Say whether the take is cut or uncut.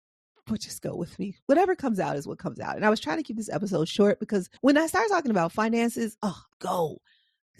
cut